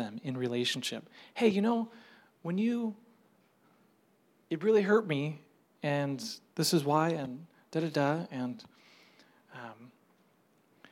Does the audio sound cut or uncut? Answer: uncut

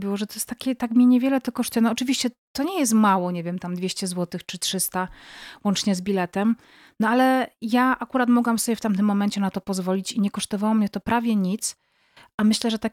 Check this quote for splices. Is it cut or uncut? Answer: uncut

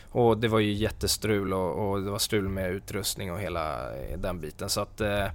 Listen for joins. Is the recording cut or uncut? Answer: uncut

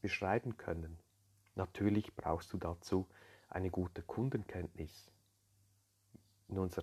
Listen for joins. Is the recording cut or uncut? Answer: uncut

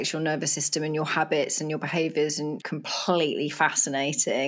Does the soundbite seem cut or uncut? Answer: cut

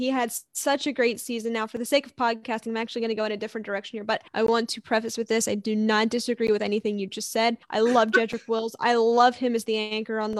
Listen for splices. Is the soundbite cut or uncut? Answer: cut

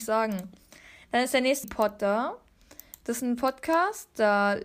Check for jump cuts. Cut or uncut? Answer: cut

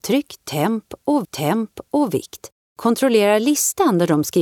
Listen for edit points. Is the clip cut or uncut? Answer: cut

